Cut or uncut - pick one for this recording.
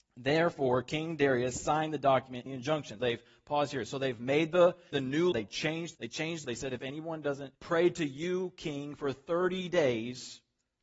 cut